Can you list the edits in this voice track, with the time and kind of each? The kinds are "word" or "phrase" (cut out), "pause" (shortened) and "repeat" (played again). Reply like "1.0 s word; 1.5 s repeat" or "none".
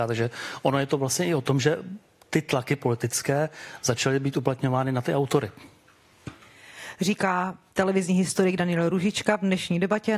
none